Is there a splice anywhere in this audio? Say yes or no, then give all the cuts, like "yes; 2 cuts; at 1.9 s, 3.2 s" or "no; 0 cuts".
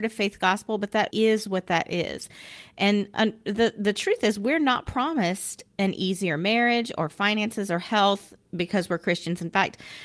yes; 1 cut; at 1.1 s